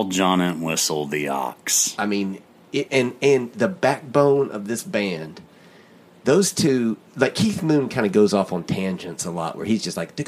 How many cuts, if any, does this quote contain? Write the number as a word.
zero